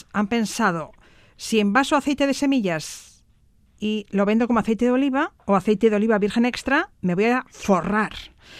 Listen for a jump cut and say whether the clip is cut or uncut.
uncut